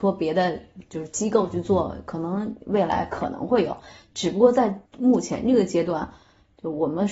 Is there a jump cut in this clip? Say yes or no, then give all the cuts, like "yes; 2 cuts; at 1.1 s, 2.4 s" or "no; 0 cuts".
yes; 1 cut; at 4.9 s